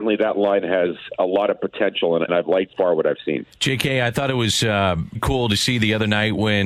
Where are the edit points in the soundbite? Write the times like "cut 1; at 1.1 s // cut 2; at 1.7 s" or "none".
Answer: cut 1; at 2.3 s // cut 2; at 2.7 s // cut 3; at 5.1 s